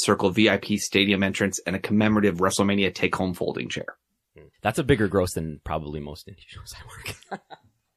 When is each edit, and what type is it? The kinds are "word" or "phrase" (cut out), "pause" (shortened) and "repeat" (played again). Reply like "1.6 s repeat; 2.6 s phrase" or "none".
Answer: 4.5 s pause